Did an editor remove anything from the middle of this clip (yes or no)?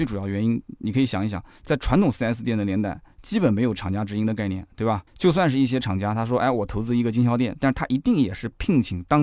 yes